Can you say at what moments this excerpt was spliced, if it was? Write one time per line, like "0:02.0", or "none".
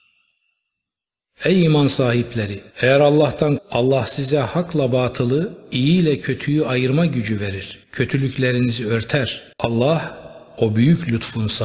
0:02.7
0:03.6
0:07.8
0:09.5